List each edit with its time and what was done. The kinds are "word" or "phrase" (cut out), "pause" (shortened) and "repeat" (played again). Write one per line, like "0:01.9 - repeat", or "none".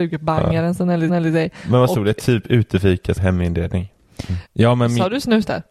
0:01.1 - repeat
0:03.2 - word
0:04.5 - pause